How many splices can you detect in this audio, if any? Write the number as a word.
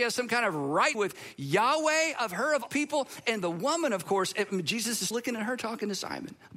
three